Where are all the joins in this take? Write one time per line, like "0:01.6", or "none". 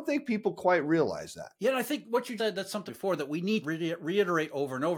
0:01.6
0:02.4
0:02.9
0:03.6